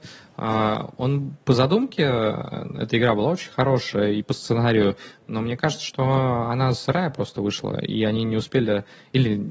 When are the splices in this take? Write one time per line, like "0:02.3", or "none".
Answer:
0:01.4